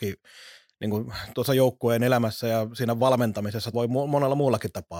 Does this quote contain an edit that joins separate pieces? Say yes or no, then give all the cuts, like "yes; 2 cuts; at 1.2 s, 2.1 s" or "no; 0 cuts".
yes; 1 cut; at 3.7 s